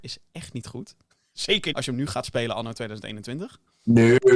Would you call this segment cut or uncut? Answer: cut